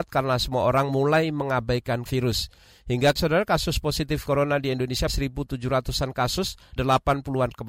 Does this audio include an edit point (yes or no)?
yes